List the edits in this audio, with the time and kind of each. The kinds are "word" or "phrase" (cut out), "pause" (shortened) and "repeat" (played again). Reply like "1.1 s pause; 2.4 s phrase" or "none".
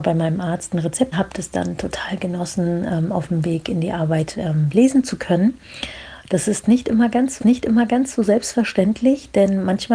1.1 s phrase; 7.4 s repeat